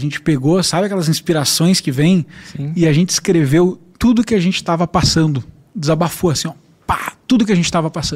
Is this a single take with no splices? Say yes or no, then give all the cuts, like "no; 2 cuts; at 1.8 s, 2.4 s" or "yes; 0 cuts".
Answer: yes; 0 cuts